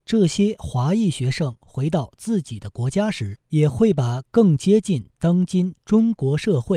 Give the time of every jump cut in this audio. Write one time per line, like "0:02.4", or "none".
0:03.4